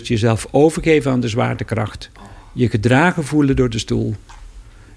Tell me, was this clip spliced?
no; 0 cuts

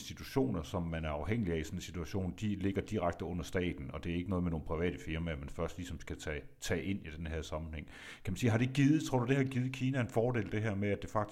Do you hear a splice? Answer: no; 0 cuts

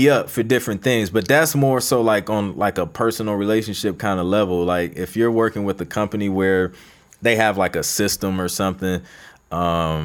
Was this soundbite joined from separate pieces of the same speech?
no; 0 cuts

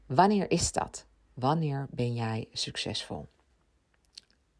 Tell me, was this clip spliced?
no; 0 cuts

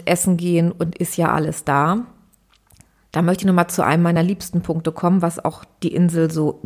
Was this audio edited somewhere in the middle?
no; 0 cuts

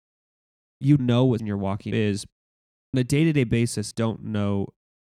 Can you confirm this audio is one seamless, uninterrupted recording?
no; 5 cuts; at 1.0 s, 1.4 s, 1.9 s, 2.9 s, 3.9 s

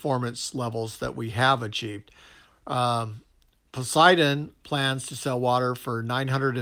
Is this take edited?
no; 0 cuts

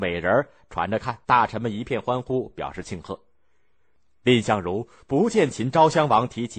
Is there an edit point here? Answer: yes; 1 cut; at 1.2 s

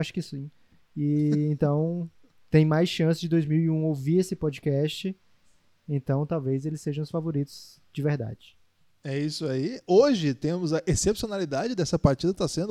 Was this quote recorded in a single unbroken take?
yes; 0 cuts

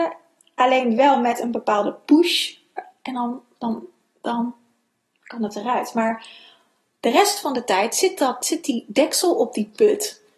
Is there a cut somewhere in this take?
no; 0 cuts

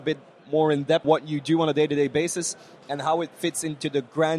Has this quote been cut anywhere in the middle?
yes; 1 cut; at 1.0 s

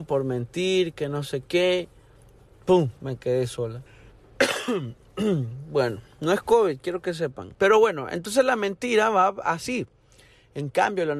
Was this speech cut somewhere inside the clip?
yes; 3 cuts; at 3.0 s, 3.9 s, 7.5 s

